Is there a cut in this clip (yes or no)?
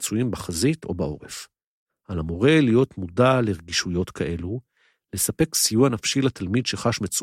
no